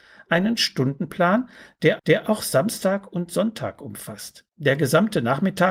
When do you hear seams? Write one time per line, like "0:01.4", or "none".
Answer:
0:02.0
0:04.5